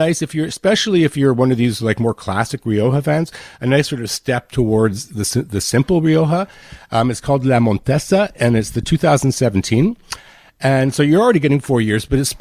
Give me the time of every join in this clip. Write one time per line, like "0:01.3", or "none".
none